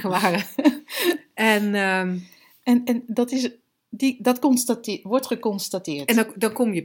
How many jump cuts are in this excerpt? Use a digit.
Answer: 0